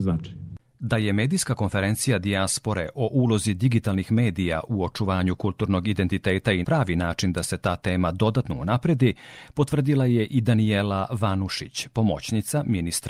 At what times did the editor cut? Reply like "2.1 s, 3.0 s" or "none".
6.6 s